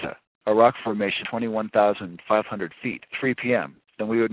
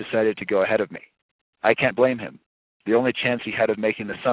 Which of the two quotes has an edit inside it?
first; 2 cuts; at 1.2 s, 3.1 s

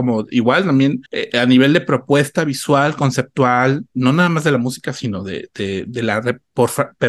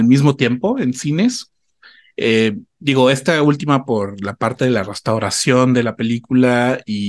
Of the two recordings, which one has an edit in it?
first; 1 cut; at 1.1 s

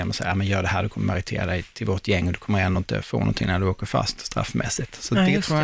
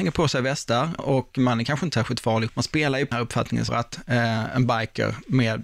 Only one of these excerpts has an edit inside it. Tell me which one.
second; 4 cuts; at 1.0 s, 2.5 s, 3.1 s, 3.7 s

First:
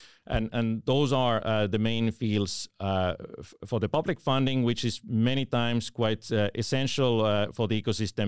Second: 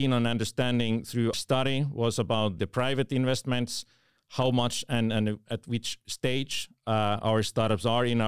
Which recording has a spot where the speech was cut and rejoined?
second; 2 cuts; at 1.3 s, 2.6 s

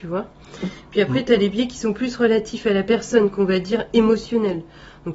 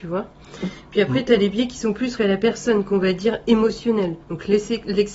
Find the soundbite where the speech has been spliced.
second; 2 cuts; at 2.2 s, 4.2 s

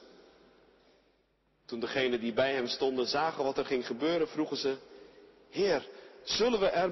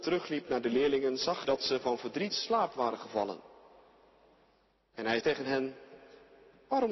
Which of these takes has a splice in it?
second; 3 cuts; at 1.4 s, 2.3 s, 5.2 s

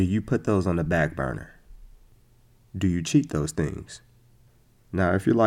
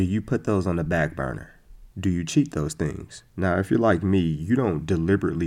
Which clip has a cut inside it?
second; 2 cuts; at 1.9 s, 3.3 s

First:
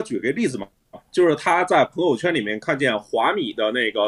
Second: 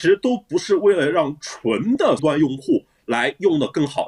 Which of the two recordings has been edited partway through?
second; 1 cut; at 2.2 s

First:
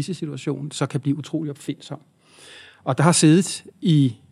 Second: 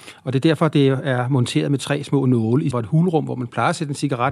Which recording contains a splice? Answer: second; 1 cut; at 2.7 s

